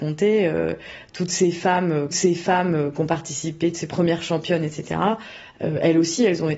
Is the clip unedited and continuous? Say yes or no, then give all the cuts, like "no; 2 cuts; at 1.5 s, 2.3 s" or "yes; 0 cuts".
no; 1 cut; at 2.1 s